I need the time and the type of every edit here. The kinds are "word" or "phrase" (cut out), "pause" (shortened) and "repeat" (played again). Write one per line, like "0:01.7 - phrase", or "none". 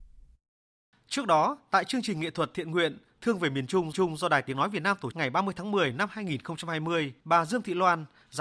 0:03.9 - repeat
0:05.1 - word
0:07.2 - pause